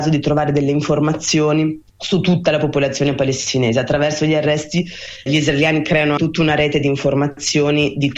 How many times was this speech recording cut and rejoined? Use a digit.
3